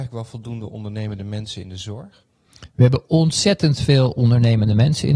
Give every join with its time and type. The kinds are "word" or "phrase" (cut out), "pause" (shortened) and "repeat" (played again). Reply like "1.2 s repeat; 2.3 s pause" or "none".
none